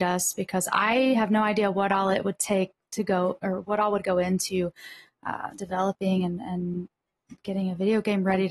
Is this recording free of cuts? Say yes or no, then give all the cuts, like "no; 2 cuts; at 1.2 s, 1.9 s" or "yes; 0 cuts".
yes; 0 cuts